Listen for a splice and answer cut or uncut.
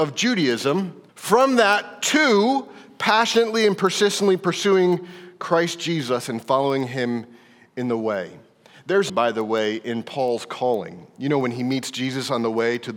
cut